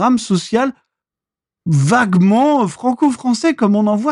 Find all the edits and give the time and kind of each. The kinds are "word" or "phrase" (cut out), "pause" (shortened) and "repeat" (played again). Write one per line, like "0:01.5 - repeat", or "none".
none